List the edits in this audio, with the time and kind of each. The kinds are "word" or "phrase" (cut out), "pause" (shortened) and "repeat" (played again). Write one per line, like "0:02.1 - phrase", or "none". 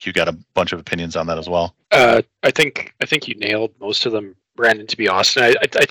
0:01.8 - pause